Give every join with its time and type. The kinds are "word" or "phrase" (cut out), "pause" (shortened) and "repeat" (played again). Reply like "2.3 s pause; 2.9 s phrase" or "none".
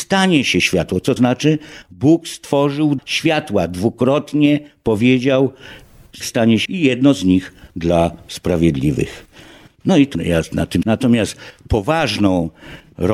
1.2 s word; 3.0 s word; 6.2 s word; 6.7 s word; 7.7 s word; 10.1 s word; 10.8 s word